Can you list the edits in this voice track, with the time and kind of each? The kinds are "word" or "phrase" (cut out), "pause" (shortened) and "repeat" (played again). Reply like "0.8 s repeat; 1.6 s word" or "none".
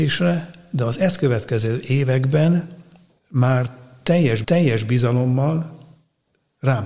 4.4 s repeat